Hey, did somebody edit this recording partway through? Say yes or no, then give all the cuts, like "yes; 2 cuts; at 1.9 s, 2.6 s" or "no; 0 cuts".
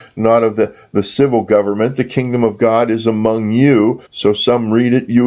yes; 1 cut; at 4.1 s